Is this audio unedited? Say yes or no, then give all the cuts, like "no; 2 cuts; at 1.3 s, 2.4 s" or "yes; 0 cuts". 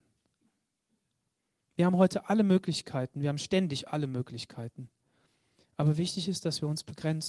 yes; 0 cuts